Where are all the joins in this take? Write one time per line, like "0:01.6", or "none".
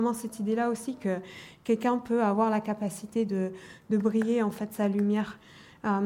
none